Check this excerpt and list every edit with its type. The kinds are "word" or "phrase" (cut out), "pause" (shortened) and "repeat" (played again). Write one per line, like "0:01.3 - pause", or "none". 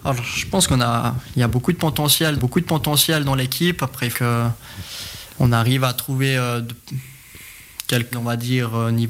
0:02.4 - repeat
0:04.1 - word
0:08.1 - word